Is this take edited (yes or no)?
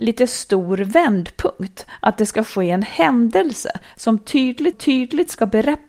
yes